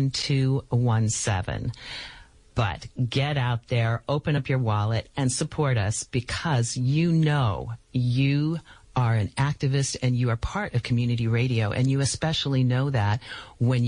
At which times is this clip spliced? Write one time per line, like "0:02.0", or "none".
none